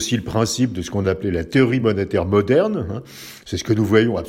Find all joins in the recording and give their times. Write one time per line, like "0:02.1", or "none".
none